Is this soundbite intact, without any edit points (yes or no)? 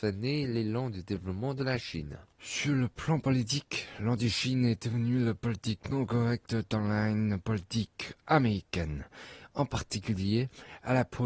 no